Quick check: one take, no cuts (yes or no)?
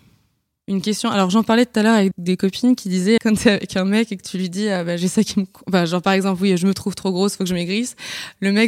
no